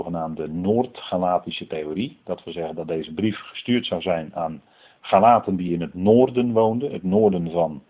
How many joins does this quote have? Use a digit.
0